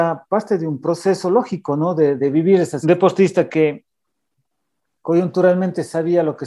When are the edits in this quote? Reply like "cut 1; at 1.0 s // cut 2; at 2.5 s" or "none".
cut 1; at 2.2 s // cut 2; at 2.8 s